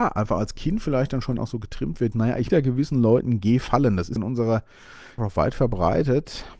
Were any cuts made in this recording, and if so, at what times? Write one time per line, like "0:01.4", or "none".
0:01.4
0:02.1
0:02.5
0:04.2
0:05.2